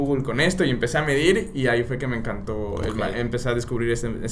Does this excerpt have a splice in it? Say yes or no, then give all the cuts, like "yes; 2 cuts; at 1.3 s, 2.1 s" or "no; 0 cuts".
no; 0 cuts